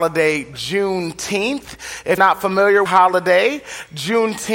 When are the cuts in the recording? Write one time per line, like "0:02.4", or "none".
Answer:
0:02.2
0:02.9